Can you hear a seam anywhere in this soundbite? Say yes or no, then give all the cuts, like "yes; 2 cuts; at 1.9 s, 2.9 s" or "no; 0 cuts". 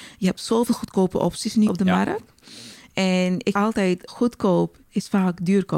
yes; 4 cuts; at 1.7 s, 3.5 s, 4.1 s, 4.8 s